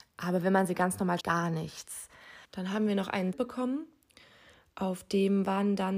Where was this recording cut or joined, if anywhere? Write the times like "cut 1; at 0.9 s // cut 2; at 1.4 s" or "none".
cut 1; at 1.2 s // cut 2; at 2.4 s // cut 3; at 3.3 s